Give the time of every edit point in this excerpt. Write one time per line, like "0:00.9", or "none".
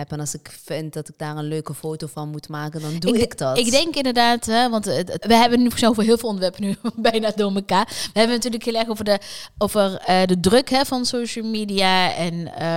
0:05.2